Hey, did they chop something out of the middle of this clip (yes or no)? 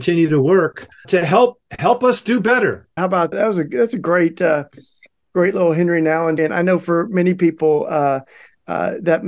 yes